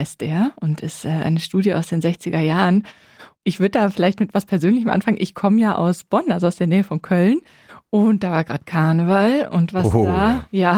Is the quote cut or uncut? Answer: uncut